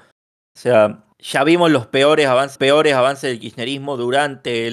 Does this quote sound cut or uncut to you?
cut